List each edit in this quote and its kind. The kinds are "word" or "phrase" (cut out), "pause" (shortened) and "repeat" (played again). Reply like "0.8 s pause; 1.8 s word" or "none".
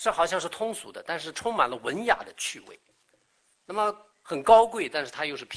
none